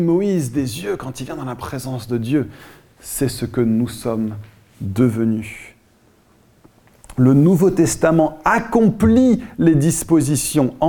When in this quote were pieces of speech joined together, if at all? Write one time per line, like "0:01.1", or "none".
none